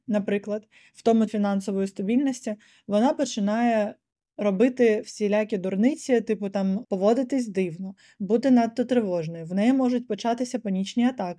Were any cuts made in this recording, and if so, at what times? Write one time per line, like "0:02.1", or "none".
0:01.3
0:06.8